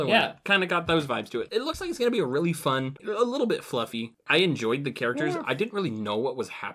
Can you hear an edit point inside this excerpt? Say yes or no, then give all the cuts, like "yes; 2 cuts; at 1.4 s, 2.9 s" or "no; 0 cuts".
no; 0 cuts